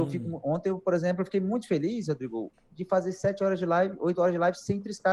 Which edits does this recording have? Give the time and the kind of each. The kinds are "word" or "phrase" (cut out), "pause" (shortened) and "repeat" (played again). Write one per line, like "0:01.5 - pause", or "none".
none